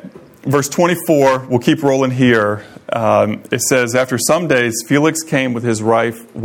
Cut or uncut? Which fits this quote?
uncut